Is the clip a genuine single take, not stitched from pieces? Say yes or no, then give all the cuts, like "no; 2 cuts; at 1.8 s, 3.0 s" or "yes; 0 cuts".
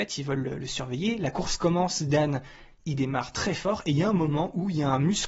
yes; 0 cuts